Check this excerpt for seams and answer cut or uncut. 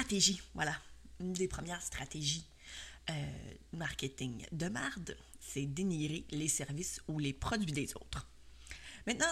cut